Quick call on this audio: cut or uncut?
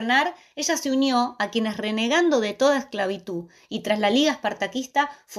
uncut